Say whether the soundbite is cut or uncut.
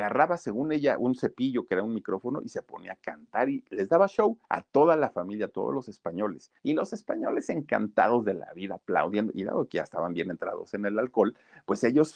cut